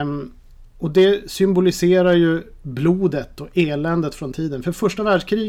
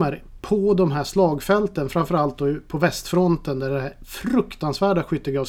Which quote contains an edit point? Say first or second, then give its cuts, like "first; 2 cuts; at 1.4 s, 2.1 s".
first; 1 cut; at 4.3 s